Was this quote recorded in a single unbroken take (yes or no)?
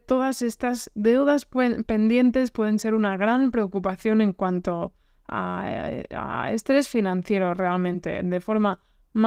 yes